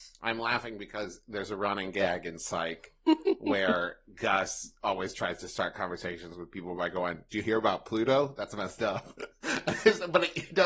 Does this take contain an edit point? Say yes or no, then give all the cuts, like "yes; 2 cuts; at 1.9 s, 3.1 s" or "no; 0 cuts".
no; 0 cuts